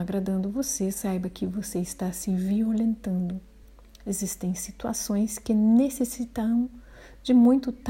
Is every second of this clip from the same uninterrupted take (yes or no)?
yes